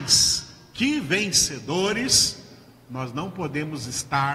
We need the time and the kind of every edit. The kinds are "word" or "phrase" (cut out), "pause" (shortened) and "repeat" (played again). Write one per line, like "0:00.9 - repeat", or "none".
none